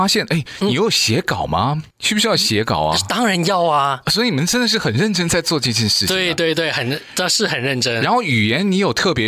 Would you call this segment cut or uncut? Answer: cut